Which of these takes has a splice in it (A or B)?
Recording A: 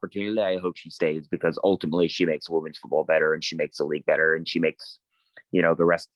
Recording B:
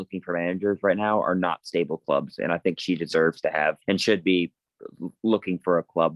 B